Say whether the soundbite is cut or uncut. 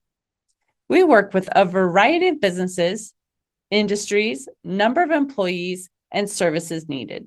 uncut